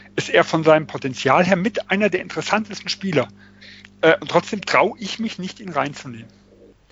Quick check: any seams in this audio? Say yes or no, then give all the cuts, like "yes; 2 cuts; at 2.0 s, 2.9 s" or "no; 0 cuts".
no; 0 cuts